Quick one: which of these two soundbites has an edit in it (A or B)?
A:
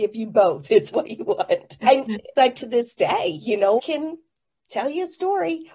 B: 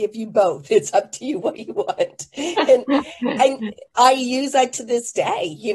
A